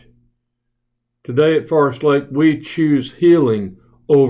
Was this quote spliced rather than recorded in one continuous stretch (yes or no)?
no